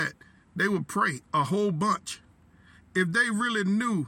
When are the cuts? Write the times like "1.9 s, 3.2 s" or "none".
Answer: none